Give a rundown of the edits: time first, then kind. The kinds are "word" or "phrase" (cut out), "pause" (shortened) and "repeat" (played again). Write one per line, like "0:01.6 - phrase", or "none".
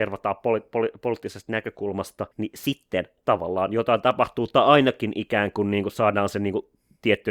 0:02.3 - pause